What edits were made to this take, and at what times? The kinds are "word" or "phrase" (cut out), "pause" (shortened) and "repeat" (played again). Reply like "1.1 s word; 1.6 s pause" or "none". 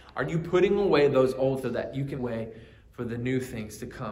1.6 s word; 2.2 s word